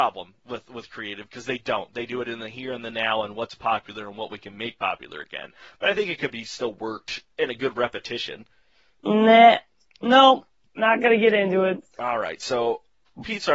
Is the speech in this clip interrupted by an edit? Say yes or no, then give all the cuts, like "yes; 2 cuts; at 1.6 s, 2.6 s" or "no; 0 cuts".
no; 0 cuts